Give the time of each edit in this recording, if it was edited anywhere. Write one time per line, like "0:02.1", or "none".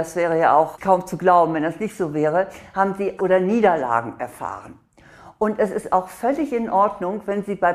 0:03.2